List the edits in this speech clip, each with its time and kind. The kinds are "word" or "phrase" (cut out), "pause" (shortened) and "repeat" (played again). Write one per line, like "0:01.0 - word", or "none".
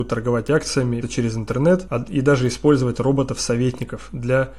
0:01.0 - word